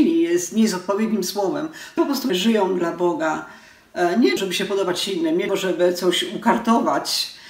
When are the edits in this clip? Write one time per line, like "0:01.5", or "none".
0:02.0
0:02.3
0:04.4
0:05.5